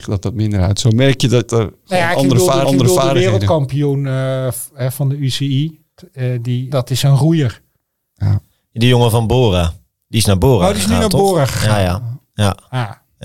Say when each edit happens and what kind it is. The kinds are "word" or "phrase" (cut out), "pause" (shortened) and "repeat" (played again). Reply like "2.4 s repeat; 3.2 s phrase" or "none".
2.6 s repeat; 6.7 s word

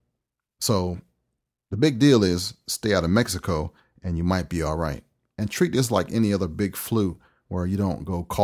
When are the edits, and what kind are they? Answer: none

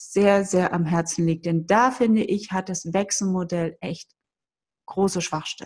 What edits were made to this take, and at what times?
none

